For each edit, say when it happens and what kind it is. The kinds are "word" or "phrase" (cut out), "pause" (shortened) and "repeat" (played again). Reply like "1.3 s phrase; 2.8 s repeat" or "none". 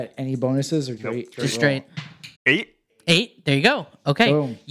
1.0 s word; 1.3 s word; 2.3 s pause